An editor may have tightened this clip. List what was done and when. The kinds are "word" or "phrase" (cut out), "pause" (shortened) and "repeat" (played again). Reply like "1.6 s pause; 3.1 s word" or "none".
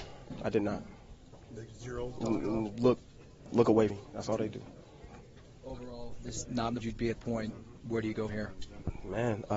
1.4 s pause; 2.7 s word; 3.9 s word; 6.4 s word; 6.8 s phrase; 7.1 s word; 8.3 s word

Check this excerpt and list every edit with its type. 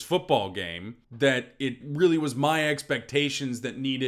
1.0 s pause; 1.8 s word

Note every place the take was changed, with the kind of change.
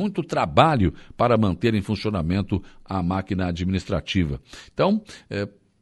none

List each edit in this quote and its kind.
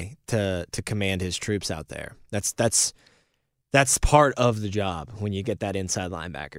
none

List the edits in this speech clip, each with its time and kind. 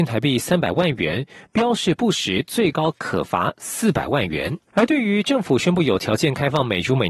4.7 s pause

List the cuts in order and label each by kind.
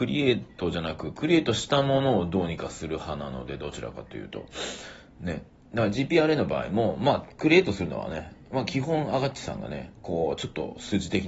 none

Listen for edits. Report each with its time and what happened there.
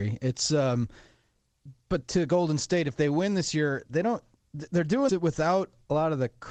2.0 s word; 3.9 s word; 5.1 s word

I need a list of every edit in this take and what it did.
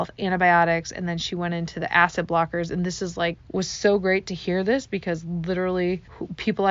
none

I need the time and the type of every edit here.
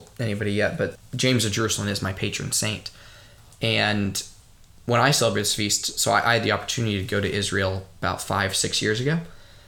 1.0 s word

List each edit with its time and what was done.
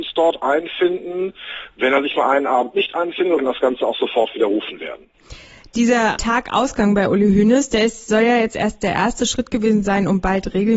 3.4 s phrase

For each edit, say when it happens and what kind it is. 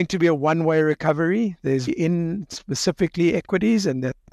1.9 s word

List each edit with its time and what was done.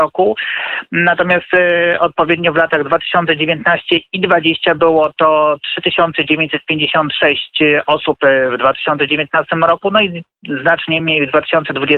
none

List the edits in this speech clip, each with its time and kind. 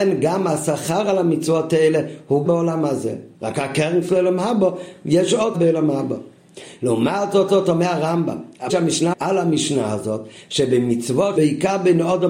2.5 s word; 3.3 s pause; 4.0 s word; 5.5 s word; 7.5 s repeat; 8.7 s word; 9.1 s word; 11.4 s word

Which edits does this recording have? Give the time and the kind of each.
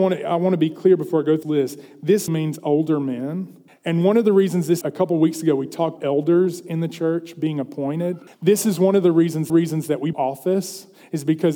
1.4 s word; 2.3 s word; 3.7 s pause; 4.8 s phrase; 6.0 s word; 8.3 s pause; 9.5 s repeat; 10.1 s phrase

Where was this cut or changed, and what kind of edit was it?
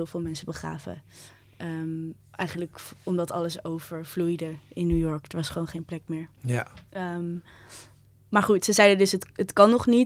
2.2 s pause; 6.9 s pause

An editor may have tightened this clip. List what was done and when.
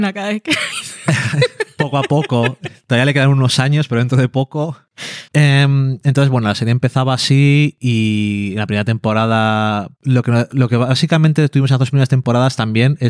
5.3 s pause

